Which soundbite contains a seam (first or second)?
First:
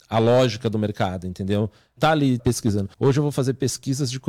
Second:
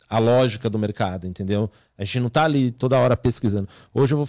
first